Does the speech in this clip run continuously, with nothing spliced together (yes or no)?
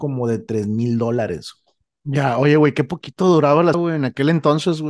no